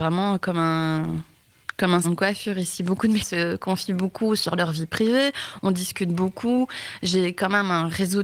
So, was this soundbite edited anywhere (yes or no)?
yes